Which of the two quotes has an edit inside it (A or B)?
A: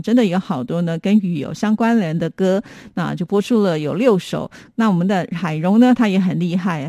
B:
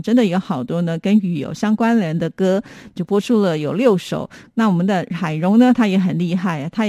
B